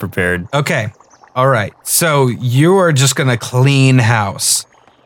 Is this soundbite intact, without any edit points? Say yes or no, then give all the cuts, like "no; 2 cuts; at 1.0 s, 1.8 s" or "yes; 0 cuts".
yes; 0 cuts